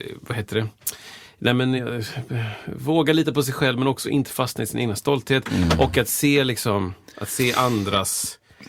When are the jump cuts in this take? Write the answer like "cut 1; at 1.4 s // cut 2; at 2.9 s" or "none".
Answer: none

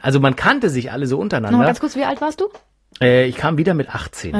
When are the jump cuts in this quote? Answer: none

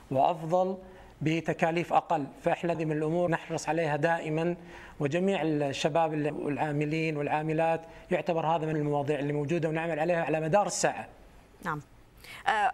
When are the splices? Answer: cut 1; at 2.7 s // cut 2; at 3.3 s // cut 3; at 6.3 s // cut 4; at 8.7 s

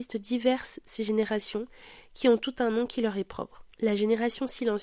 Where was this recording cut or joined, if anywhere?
cut 1; at 3.7 s

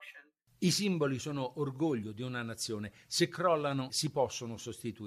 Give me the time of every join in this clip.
cut 1; at 3.9 s

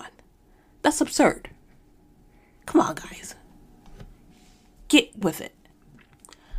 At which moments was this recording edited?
cut 1; at 5.2 s

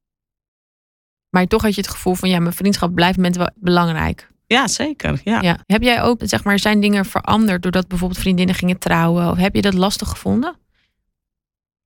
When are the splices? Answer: cut 1; at 3.2 s // cut 2; at 3.5 s // cut 3; at 5.6 s // cut 4; at 6.2 s

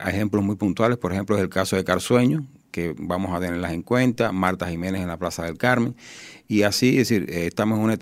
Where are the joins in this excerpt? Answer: none

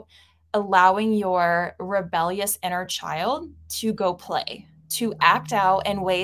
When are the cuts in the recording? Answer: none

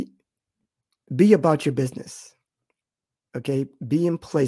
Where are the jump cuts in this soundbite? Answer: none

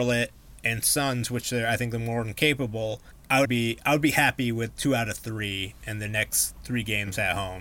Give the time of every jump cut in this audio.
cut 1; at 3.4 s

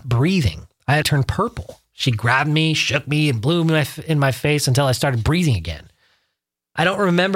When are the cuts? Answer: cut 1; at 1.0 s

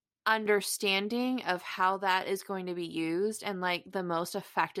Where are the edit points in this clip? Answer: none

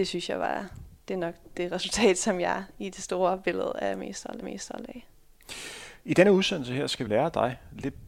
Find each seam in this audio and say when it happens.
cut 1; at 4.4 s // cut 2; at 7.1 s

